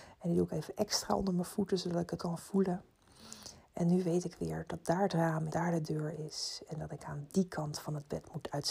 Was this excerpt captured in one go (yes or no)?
no